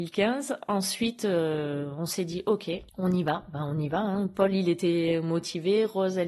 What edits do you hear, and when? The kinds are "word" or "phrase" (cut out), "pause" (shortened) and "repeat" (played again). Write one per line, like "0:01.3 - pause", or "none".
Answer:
0:02.9 - pause